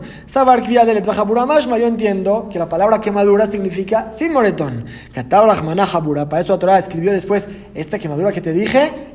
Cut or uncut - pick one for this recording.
uncut